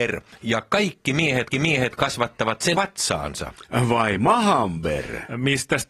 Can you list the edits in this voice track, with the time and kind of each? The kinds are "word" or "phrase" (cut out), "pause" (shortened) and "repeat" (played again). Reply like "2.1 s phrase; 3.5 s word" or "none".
1.5 s repeat; 2.7 s word

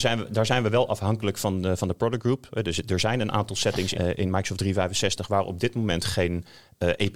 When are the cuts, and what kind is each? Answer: 3.9 s word

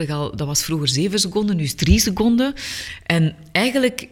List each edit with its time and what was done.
none

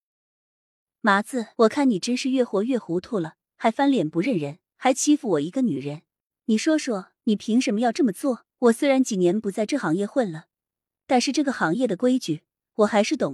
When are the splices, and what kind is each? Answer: 1.5 s pause; 3.5 s pause; 4.7 s pause; 7.2 s pause; 8.5 s pause

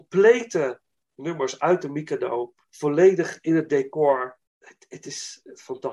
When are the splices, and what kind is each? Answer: 2.6 s pause; 4.5 s pause

